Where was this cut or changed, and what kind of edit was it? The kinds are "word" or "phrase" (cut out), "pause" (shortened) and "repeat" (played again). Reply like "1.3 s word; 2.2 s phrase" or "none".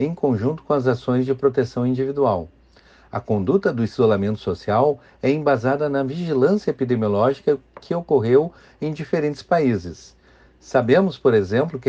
none